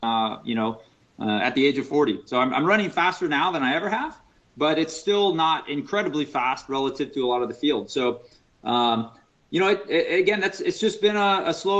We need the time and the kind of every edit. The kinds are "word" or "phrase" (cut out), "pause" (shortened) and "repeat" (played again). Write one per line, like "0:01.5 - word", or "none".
none